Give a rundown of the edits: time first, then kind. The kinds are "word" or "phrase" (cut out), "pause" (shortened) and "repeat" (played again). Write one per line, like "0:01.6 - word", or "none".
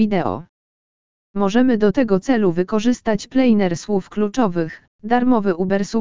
none